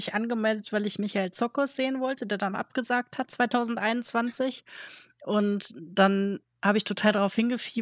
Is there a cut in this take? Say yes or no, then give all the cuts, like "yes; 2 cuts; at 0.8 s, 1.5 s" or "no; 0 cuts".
no; 0 cuts